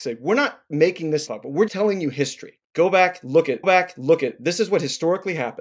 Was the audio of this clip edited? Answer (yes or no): yes